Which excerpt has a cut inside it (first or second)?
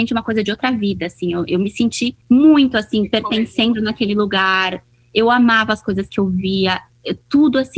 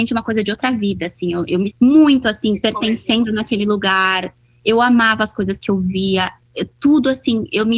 second